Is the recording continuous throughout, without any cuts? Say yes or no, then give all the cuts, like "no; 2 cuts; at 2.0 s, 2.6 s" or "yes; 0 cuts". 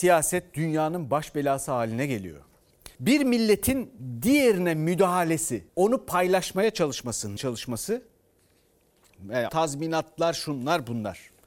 no; 4 cuts; at 2.9 s, 5.7 s, 7.4 s, 9.5 s